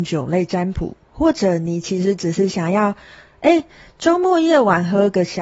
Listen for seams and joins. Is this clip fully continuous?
yes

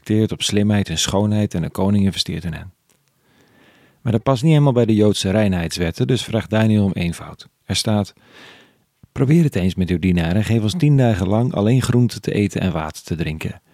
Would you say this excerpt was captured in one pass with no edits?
yes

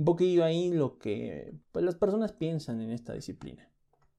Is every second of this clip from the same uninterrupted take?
no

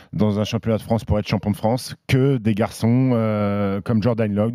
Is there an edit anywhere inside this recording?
no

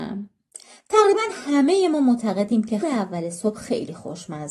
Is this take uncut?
no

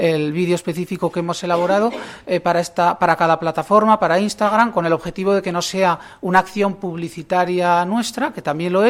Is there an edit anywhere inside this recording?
no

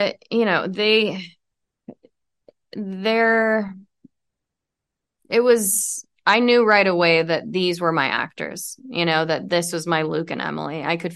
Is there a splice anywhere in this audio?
no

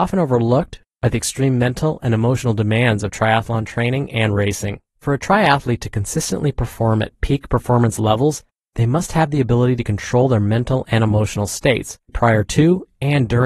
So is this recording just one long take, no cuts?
no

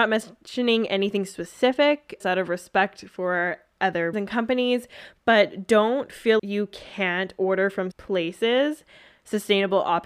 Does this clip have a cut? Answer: yes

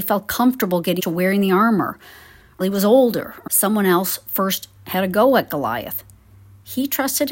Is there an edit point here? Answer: yes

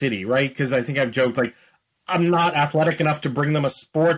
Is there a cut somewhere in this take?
no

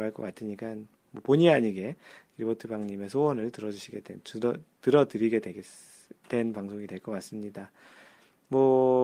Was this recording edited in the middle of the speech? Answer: no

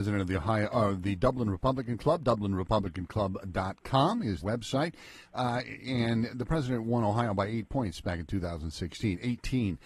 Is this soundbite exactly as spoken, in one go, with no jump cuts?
no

